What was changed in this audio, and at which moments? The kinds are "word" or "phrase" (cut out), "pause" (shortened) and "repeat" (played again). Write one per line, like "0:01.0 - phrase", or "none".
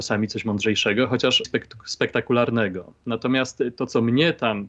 0:01.4 - word

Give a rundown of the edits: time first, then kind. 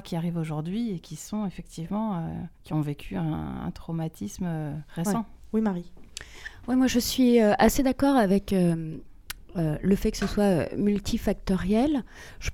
0:02.5 - pause
0:04.9 - pause

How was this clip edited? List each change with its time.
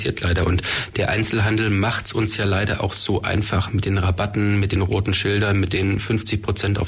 none

